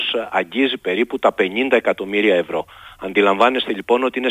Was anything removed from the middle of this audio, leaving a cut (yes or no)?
no